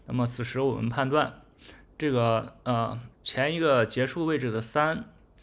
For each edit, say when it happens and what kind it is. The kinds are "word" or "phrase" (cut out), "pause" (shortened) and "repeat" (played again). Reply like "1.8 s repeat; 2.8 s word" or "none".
3.1 s pause